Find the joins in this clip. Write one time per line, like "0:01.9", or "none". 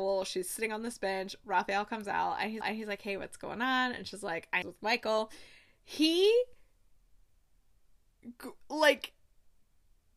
0:02.6
0:04.6